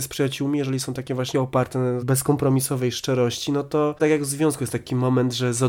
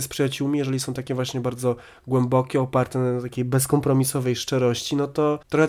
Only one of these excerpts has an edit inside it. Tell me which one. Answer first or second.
first